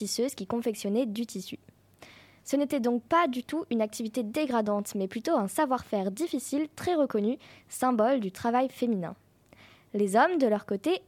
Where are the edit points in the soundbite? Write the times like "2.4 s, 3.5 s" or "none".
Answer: none